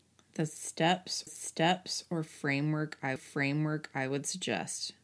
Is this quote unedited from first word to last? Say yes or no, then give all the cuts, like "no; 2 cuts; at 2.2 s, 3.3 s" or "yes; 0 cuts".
no; 2 cuts; at 1.3 s, 3.2 s